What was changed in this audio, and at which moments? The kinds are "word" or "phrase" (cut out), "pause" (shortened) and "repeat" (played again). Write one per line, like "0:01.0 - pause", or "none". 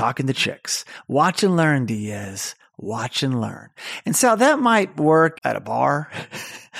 0:05.3 - word